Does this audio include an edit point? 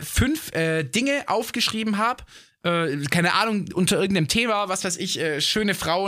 no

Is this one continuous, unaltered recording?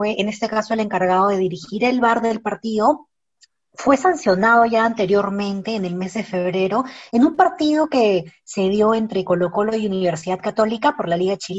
yes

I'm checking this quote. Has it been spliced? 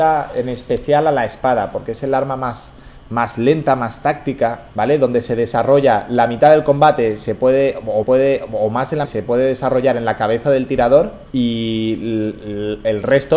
yes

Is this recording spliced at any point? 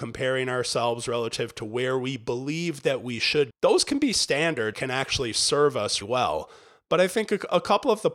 yes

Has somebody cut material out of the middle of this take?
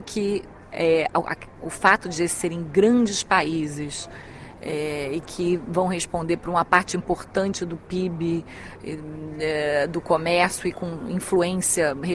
no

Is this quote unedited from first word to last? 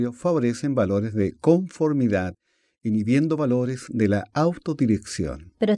yes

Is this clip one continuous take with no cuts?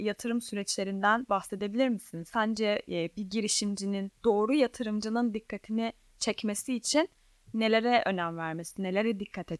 yes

